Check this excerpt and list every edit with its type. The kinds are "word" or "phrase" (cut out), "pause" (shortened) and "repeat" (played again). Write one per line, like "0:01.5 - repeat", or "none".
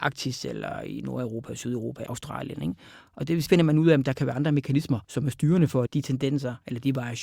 0:02.1 - word
0:03.5 - phrase
0:05.0 - pause
0:05.9 - phrase